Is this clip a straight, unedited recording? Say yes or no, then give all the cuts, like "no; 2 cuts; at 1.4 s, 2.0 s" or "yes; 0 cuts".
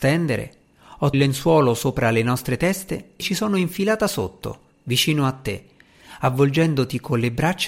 no; 2 cuts; at 1.1 s, 3.2 s